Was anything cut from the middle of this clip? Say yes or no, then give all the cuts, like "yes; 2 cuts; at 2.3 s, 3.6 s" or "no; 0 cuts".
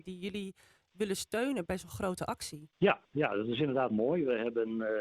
yes; 3 cuts; at 1.7 s, 2.7 s, 3.9 s